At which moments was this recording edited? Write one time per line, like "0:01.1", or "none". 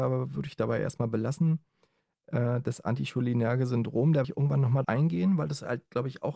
0:04.2
0:04.8